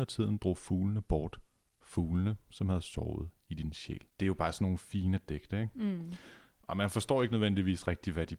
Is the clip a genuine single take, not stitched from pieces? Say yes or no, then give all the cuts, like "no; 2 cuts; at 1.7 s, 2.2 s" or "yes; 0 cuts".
no; 1 cut; at 4.1 s